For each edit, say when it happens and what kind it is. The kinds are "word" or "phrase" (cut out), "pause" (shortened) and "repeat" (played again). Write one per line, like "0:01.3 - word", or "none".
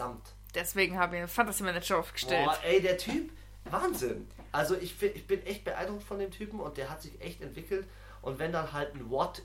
none